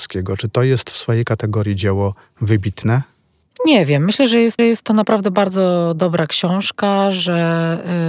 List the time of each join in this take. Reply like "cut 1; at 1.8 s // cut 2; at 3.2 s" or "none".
cut 1; at 3.4 s // cut 2; at 4.6 s